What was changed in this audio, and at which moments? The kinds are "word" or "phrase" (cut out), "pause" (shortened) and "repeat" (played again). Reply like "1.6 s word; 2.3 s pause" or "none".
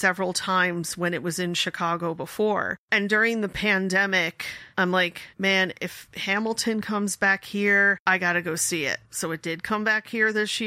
2.8 s pause; 4.7 s pause; 5.3 s pause; 8.0 s pause; 9.0 s pause